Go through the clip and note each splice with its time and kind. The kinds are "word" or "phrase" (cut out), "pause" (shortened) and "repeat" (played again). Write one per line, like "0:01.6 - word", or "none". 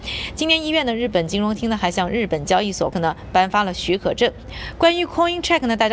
0:02.9 - word